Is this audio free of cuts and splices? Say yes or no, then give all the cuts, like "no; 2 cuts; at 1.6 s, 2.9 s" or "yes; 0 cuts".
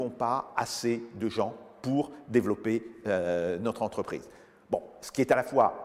yes; 0 cuts